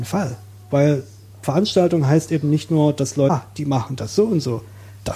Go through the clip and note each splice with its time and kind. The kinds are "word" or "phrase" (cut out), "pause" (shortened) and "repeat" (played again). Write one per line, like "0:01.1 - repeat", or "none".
none